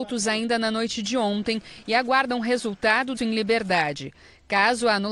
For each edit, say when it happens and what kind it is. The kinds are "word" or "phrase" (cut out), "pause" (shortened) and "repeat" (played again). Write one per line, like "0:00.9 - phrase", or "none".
0:03.2 - word